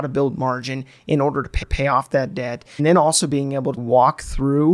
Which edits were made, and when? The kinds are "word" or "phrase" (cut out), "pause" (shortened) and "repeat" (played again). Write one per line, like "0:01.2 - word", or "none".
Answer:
0:01.6 - repeat
0:02.8 - phrase
0:03.8 - word